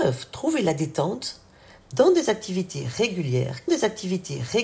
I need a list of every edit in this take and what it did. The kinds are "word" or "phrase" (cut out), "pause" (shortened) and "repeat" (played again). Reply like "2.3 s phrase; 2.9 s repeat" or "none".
3.7 s repeat